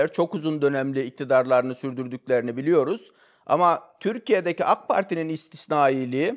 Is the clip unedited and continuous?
yes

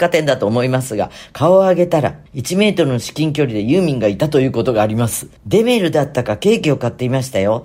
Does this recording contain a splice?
yes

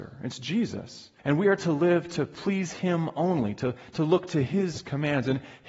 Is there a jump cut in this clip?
yes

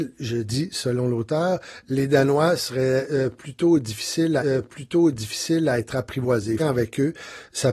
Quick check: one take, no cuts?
no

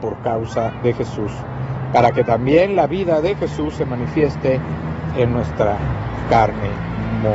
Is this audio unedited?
yes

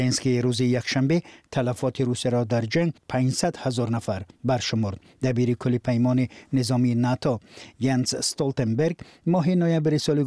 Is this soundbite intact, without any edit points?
no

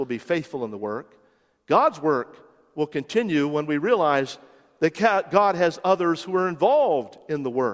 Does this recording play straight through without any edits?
yes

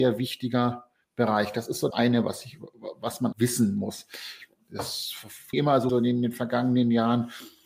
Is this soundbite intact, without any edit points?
no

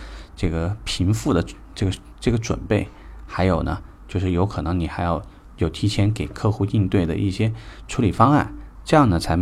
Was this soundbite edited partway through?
no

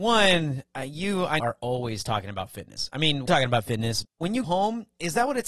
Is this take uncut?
no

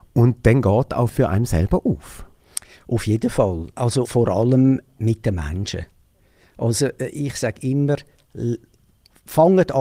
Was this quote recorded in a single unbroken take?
no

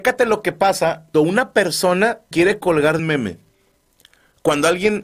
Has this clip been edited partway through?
yes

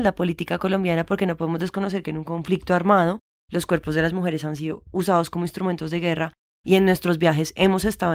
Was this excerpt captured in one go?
yes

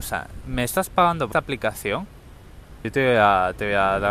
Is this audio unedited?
no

